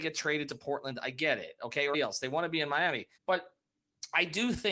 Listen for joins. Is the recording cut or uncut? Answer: cut